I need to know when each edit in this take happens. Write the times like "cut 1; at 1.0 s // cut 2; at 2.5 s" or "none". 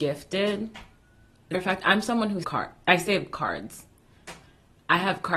cut 1; at 1.5 s // cut 2; at 2.4 s

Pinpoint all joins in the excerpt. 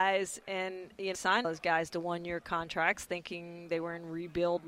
cut 1; at 1.1 s // cut 2; at 1.4 s

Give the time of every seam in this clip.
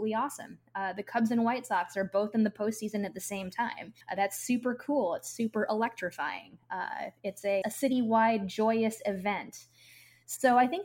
cut 1; at 4.0 s // cut 2; at 7.6 s

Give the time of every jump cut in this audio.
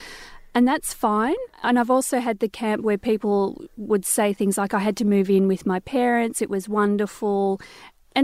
cut 1; at 1.5 s

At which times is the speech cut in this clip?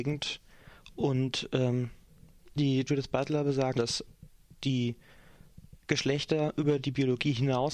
cut 1; at 2.9 s // cut 2; at 3.8 s

